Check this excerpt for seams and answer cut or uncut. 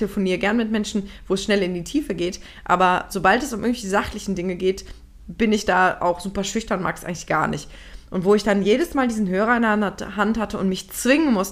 uncut